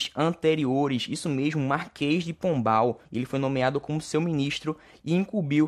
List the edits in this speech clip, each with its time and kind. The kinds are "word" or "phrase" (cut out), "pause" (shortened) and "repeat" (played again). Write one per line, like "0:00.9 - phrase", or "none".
0:03.1 - pause